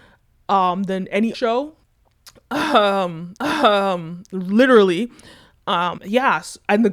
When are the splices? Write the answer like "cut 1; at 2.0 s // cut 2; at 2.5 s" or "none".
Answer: cut 1; at 1.3 s // cut 2; at 1.8 s // cut 3; at 3.4 s // cut 4; at 6.0 s